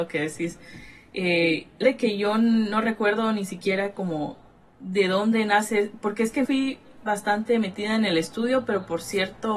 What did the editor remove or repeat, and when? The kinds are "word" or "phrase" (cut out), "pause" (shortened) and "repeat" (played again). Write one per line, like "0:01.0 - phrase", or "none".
0:01.8 - word
0:06.4 - phrase